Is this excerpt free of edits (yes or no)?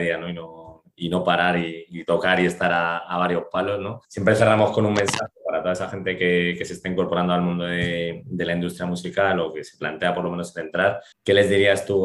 no